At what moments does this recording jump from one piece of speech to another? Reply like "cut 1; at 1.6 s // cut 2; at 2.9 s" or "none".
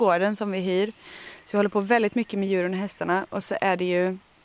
none